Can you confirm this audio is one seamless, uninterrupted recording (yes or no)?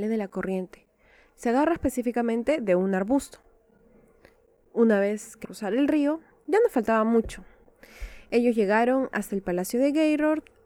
no